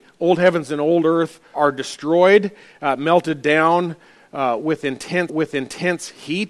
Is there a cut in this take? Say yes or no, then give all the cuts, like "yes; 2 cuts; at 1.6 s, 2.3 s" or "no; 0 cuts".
yes; 2 cuts; at 1.5 s, 5.3 s